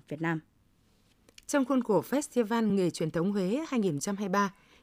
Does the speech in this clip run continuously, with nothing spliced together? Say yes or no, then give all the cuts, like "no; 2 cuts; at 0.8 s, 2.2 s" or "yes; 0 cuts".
yes; 0 cuts